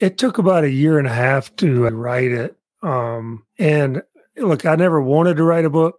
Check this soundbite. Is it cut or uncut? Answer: cut